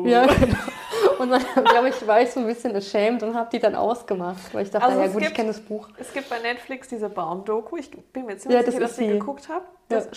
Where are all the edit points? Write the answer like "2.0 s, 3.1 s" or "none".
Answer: none